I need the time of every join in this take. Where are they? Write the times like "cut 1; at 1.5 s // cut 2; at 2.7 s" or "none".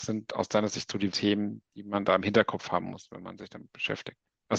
cut 1; at 1.1 s